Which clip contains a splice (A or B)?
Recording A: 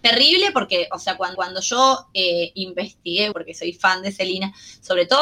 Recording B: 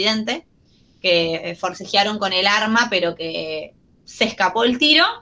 A